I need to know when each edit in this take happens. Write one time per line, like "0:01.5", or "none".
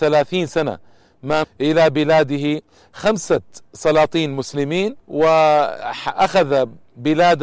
0:01.4
0:05.0